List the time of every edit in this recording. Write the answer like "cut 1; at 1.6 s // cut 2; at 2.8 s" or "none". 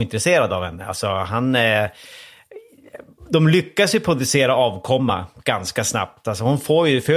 none